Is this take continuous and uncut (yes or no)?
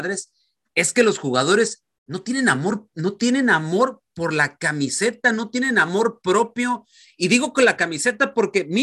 yes